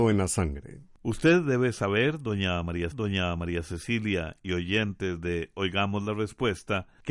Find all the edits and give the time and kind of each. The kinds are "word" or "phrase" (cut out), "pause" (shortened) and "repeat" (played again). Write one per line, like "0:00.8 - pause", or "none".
0:02.9 - repeat